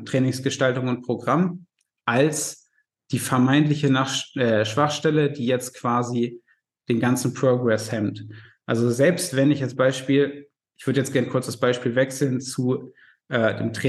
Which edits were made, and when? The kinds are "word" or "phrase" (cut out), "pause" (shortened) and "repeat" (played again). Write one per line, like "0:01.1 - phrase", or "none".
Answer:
none